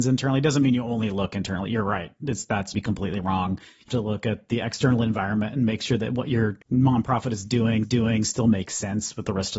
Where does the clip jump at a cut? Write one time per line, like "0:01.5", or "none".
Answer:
0:02.7
0:03.9
0:06.6
0:07.8